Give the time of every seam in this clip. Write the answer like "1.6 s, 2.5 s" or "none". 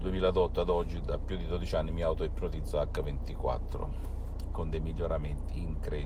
none